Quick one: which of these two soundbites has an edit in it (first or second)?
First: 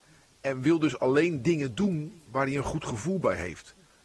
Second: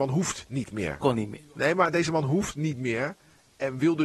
second